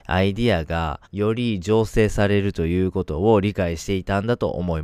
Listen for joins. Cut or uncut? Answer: cut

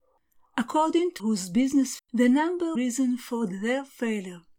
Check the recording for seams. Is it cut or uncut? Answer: cut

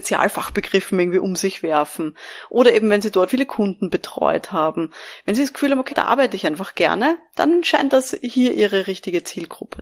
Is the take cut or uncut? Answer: cut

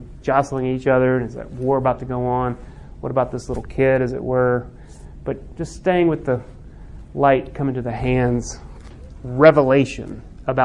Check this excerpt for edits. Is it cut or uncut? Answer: uncut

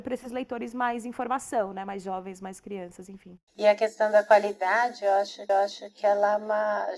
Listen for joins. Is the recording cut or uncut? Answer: cut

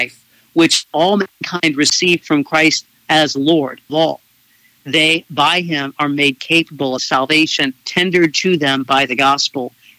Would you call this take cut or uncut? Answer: cut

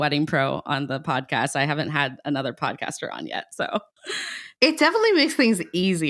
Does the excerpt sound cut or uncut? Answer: uncut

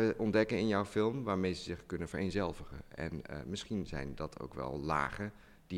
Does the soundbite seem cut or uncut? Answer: uncut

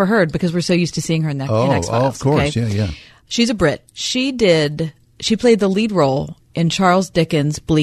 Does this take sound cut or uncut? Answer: uncut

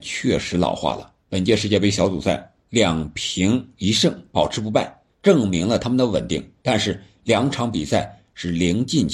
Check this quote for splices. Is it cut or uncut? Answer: cut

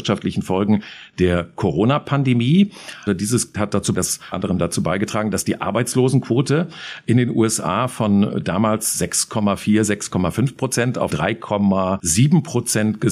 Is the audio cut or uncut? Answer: cut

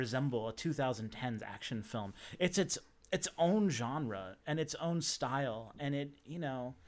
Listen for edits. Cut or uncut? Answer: uncut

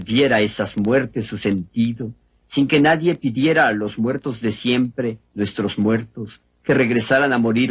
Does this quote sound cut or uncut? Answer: uncut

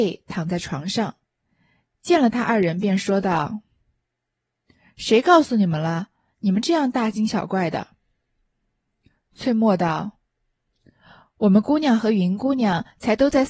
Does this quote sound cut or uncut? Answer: uncut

